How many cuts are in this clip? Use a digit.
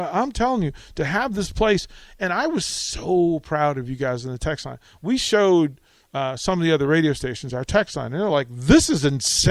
0